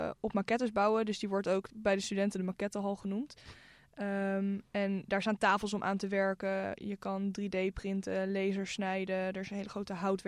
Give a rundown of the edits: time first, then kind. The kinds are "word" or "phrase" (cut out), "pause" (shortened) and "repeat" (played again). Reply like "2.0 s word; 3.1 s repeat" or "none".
none

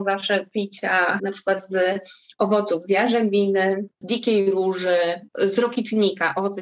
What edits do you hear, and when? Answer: 1.2 s word; 4.0 s word

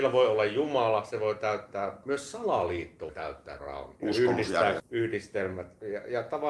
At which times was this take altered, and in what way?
2.0 s word; 3.1 s word; 3.6 s word; 4.8 s word

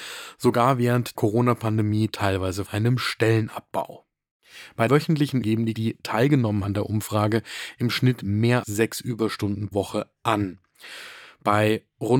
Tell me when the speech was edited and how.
1.1 s word; 2.7 s word; 4.9 s word; 5.4 s word; 5.7 s word; 6.6 s word; 8.6 s word; 9.7 s word

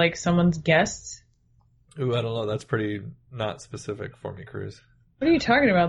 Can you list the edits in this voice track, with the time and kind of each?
1.6 s pause

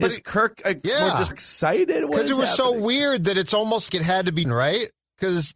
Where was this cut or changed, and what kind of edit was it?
1.3 s word; 3.9 s word; 4.4 s word

